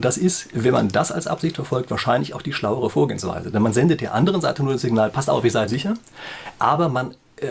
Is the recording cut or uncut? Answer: cut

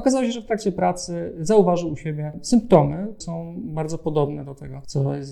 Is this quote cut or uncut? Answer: cut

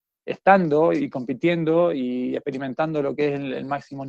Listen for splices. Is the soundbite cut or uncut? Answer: uncut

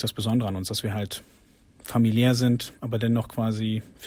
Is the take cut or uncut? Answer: uncut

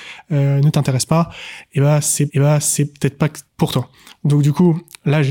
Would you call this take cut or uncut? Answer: cut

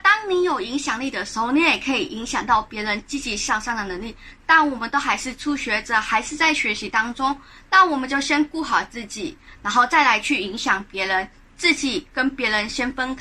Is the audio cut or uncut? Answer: uncut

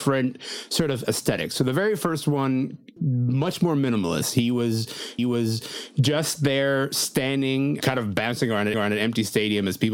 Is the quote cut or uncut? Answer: cut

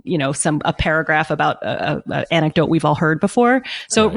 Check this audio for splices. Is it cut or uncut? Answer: uncut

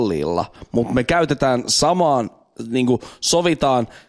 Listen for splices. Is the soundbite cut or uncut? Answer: uncut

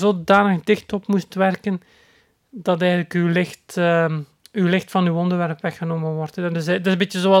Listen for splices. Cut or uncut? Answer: uncut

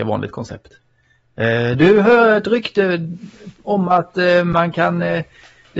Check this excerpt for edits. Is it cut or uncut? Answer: uncut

